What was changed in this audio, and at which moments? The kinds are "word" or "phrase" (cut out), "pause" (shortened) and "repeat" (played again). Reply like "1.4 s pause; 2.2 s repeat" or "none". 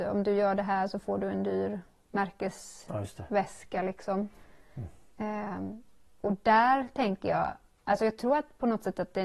none